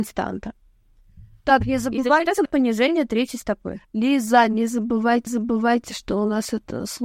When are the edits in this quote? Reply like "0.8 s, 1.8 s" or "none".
2.5 s, 5.3 s